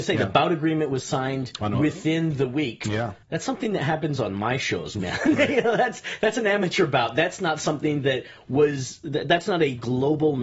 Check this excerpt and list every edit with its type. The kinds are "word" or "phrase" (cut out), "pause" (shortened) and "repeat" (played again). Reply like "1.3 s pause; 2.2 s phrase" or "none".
3.2 s pause